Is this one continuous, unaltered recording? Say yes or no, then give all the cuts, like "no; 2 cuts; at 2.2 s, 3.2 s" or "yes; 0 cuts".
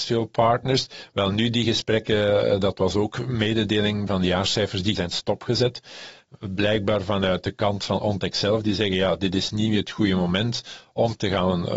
no; 2 cuts; at 4.1 s, 5.0 s